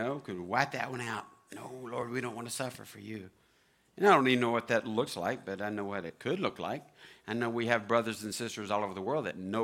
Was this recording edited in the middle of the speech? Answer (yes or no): no